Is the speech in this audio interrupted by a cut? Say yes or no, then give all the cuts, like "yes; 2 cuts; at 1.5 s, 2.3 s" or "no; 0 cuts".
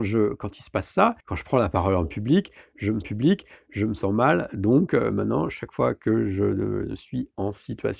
yes; 2 cuts; at 1.2 s, 3.0 s